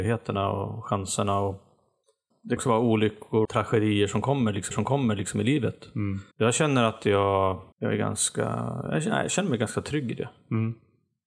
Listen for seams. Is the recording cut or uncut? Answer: cut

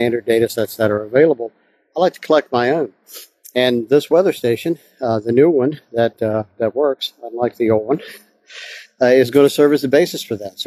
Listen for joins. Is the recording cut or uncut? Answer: uncut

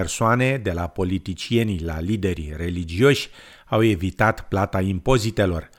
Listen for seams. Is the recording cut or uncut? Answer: uncut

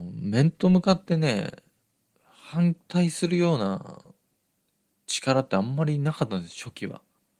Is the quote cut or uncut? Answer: uncut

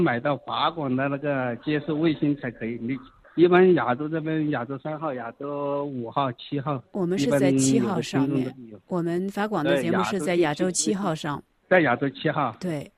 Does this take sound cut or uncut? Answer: cut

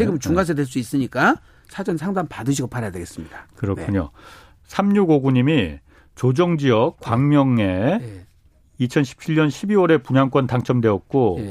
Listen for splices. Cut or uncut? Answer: uncut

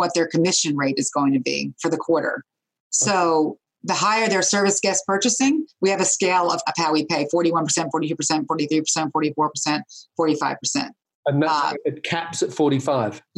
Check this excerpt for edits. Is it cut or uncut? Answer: cut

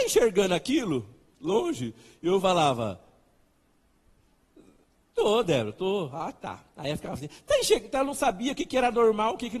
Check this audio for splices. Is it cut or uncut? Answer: uncut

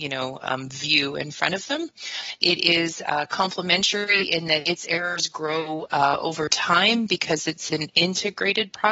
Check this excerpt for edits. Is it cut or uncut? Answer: uncut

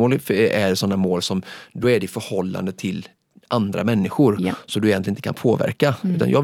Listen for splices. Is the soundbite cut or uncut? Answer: uncut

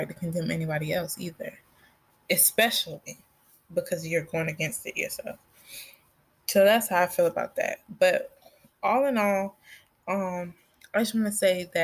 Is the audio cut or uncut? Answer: uncut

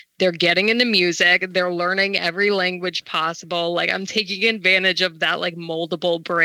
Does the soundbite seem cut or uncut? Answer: uncut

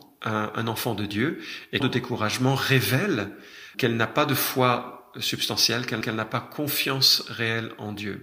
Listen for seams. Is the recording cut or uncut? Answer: cut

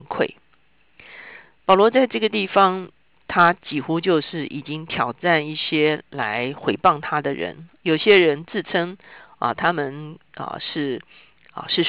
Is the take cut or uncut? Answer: uncut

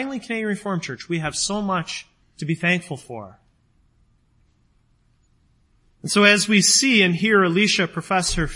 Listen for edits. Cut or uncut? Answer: cut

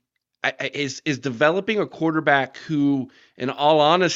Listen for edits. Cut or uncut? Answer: uncut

